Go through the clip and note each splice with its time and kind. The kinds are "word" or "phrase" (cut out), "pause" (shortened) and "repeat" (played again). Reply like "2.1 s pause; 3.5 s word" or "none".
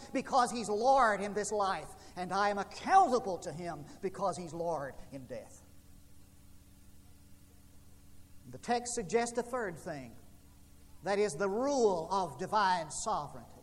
none